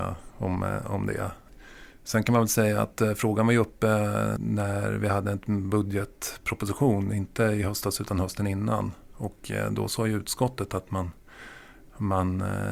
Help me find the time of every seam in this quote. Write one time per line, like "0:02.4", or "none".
none